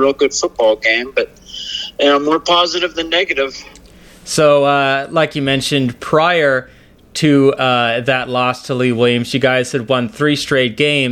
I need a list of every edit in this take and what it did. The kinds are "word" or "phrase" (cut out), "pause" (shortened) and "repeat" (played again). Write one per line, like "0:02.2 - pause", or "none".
none